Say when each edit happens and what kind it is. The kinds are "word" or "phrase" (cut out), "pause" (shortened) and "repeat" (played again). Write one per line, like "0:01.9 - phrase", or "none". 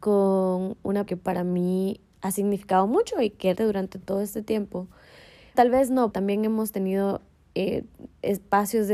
0:01.1 - word
0:02.1 - word
0:03.6 - word
0:05.5 - word
0:06.1 - word